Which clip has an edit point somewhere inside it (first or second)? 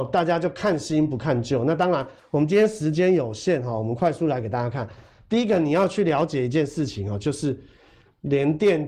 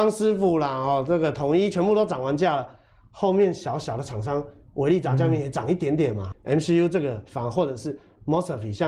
second